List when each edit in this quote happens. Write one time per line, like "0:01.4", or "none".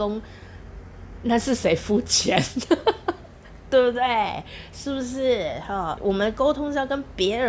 0:06.0